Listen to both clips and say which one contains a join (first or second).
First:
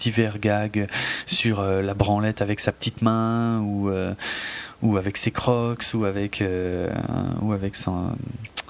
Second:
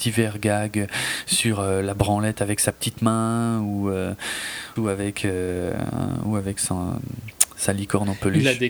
second